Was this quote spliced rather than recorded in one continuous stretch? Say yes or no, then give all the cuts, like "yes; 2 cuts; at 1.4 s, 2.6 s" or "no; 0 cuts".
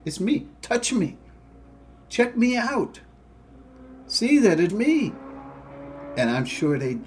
yes; 1 cut; at 4.7 s